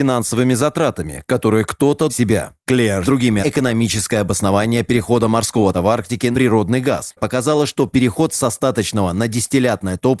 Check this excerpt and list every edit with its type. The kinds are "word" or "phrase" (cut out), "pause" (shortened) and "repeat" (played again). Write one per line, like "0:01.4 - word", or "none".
0:02.1 - phrase
0:03.0 - phrase
0:03.4 - phrase
0:05.7 - word
0:06.3 - word
0:07.2 - word

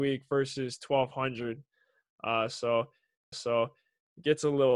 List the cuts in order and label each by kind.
0:03.3 - repeat

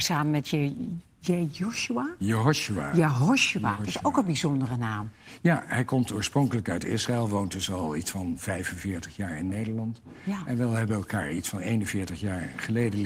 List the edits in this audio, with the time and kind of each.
none

